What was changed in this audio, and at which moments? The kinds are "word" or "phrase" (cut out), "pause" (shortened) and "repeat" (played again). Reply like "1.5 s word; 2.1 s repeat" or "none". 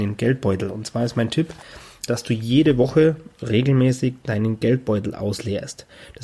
2.1 s word